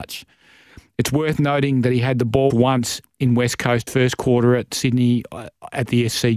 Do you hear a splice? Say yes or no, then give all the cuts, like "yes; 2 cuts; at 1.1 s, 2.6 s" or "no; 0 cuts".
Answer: yes; 2 cuts; at 2.5 s, 3.9 s